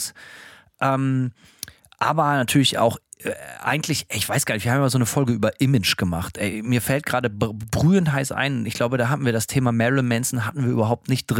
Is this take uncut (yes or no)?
yes